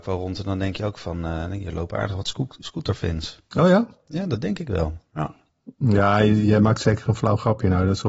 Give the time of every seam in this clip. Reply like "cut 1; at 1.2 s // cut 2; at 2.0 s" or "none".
cut 1; at 3.5 s